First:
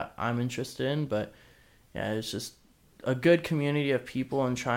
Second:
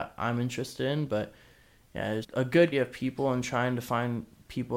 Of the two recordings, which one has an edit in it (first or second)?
second